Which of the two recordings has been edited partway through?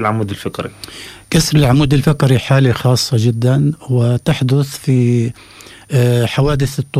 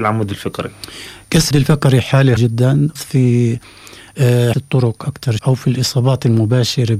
second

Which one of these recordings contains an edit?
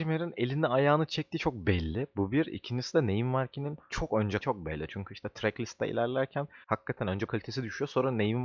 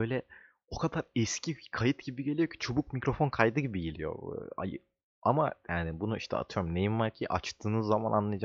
first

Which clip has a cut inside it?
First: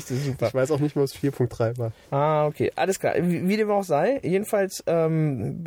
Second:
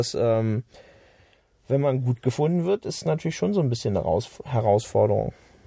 first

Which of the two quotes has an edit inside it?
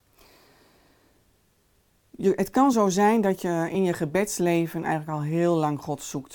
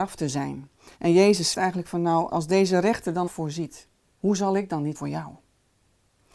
second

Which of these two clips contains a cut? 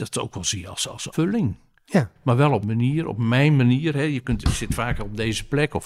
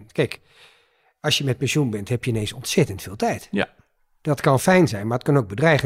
first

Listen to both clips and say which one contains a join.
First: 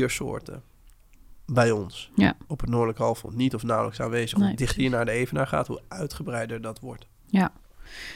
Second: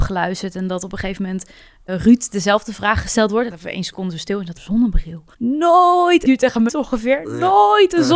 second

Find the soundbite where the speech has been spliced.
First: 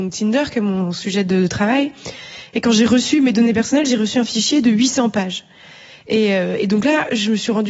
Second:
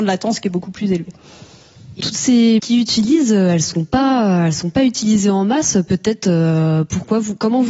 second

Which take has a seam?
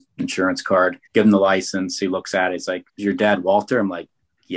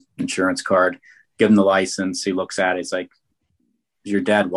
first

